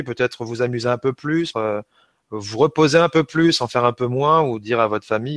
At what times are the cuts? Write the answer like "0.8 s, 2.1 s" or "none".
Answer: 1.5 s